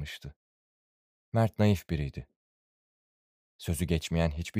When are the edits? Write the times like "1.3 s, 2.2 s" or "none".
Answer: none